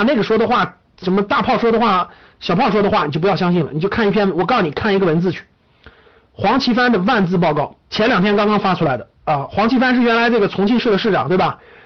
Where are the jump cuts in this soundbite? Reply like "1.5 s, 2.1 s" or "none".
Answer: 7.8 s